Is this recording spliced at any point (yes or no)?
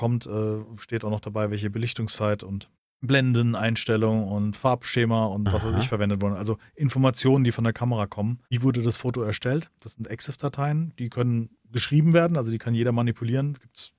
yes